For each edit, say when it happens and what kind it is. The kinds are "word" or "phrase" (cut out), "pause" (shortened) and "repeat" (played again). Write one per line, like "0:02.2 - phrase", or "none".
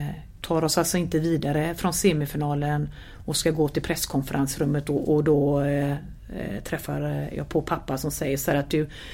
none